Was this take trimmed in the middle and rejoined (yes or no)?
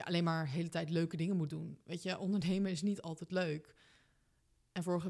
no